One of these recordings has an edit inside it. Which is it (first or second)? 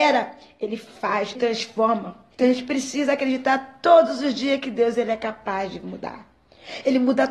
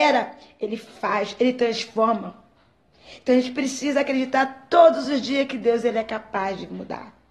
first